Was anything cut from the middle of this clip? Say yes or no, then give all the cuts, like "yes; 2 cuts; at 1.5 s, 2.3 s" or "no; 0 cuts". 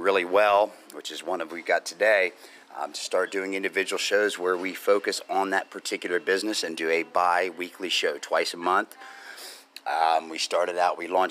no; 0 cuts